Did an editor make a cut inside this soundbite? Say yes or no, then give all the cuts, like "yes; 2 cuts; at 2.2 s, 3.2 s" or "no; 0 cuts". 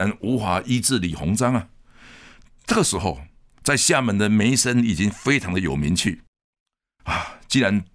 no; 0 cuts